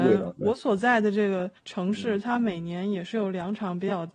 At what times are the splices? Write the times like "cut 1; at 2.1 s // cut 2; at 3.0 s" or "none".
cut 1; at 1.6 s